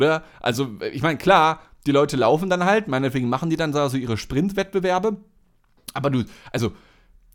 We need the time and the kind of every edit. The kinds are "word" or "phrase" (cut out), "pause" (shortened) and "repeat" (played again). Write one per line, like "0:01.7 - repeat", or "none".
none